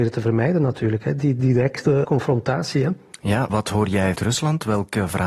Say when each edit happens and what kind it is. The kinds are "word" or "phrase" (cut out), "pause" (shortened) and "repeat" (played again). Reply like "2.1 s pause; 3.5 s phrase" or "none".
2.0 s word; 3.5 s word; 4.1 s word